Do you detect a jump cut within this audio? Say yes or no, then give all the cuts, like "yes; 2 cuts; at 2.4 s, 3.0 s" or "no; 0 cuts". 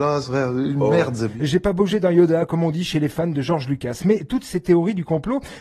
no; 0 cuts